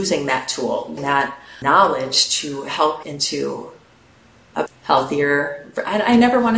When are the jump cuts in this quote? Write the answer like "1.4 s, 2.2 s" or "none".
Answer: 1.0 s, 1.6 s, 3.0 s, 4.7 s